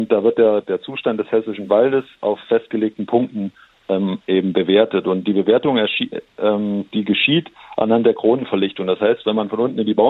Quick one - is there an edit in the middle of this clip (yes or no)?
no